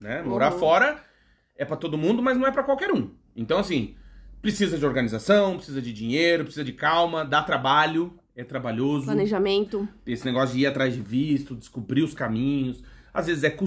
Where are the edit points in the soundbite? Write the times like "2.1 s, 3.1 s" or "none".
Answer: none